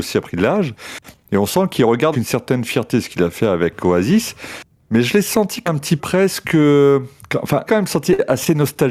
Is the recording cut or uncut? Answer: cut